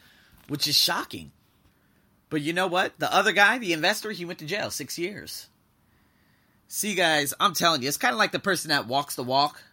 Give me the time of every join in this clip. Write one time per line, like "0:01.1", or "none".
none